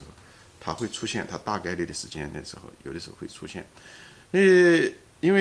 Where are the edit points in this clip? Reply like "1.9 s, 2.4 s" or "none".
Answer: 4.2 s